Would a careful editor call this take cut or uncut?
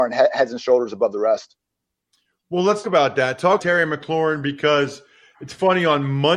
cut